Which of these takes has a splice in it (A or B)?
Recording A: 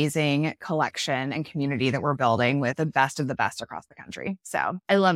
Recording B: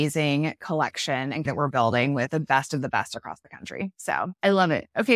B